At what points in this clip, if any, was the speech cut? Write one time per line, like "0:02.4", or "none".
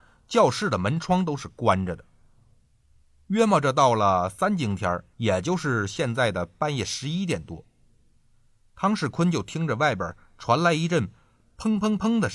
0:05.1